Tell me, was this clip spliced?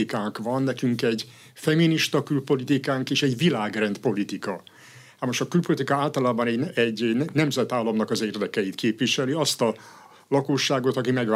no; 0 cuts

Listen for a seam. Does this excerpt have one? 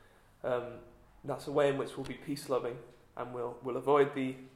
no; 0 cuts

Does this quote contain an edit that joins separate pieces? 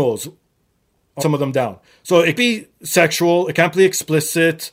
yes; 3 cuts; at 1.2 s, 2.4 s, 2.7 s

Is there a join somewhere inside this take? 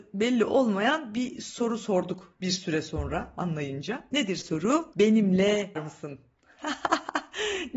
yes; 1 cut; at 5.8 s

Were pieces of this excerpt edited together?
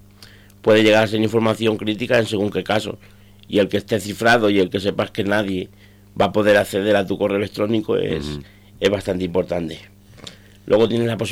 no; 0 cuts

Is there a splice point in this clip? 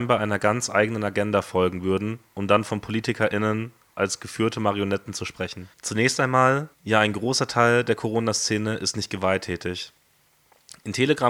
yes; 2 cuts; at 5.7 s, 6.7 s

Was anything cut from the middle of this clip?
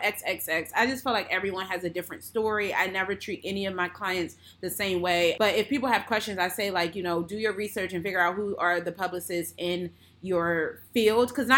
no; 0 cuts

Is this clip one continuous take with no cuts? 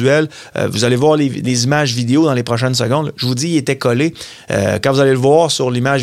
yes; 0 cuts

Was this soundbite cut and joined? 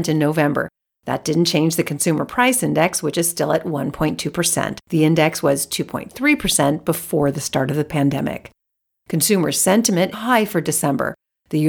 yes; 2 cuts; at 4.8 s, 10.1 s

